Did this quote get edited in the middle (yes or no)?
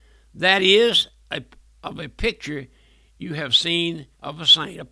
no